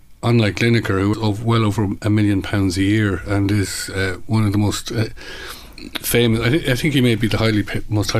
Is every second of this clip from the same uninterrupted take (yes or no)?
no